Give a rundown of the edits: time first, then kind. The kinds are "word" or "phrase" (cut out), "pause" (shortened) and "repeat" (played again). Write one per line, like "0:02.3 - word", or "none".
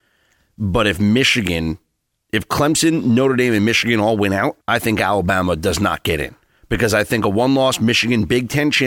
0:04.6 - pause